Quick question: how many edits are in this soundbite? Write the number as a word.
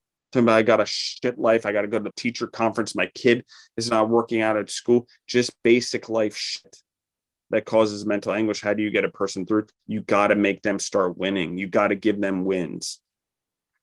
two